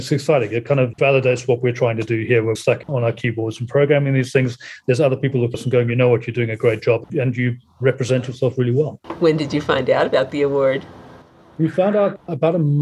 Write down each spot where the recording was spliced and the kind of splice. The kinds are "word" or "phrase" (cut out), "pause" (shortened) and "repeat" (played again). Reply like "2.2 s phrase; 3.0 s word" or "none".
1.0 s word; 2.6 s word; 5.5 s word